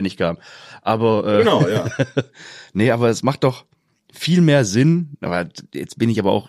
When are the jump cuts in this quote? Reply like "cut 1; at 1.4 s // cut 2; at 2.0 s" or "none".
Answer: none